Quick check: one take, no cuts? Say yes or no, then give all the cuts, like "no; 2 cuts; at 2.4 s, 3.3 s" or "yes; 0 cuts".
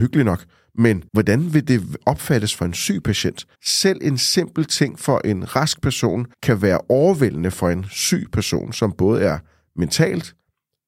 no; 3 cuts; at 1.1 s, 3.5 s, 6.3 s